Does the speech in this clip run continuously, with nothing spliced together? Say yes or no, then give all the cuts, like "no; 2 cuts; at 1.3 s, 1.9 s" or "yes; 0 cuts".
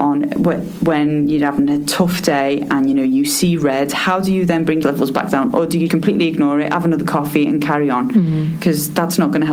no; 2 cuts; at 4.8 s, 5.9 s